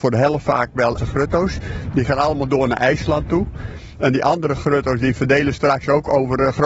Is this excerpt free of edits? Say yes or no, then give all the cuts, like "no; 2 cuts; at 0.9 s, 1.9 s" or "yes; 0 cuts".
no; 2 cuts; at 1.0 s, 5.5 s